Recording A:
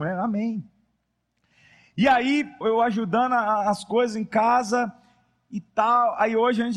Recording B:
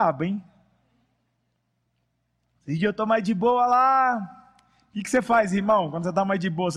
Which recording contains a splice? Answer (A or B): A